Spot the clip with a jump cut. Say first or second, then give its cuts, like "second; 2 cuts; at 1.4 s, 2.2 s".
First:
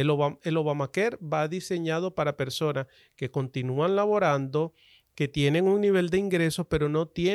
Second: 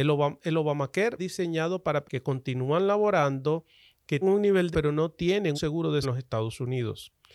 second; 6 cuts; at 1.2 s, 2.0 s, 4.2 s, 4.7 s, 5.5 s, 6.0 s